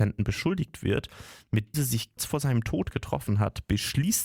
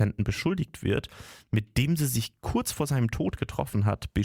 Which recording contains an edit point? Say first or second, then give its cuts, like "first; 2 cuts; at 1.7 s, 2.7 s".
first; 2 cuts; at 1.7 s, 2.2 s